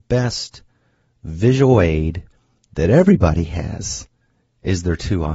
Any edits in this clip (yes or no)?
no